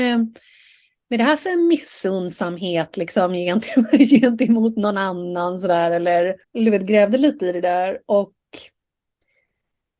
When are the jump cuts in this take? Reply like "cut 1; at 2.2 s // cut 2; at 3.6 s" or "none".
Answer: cut 1; at 6.4 s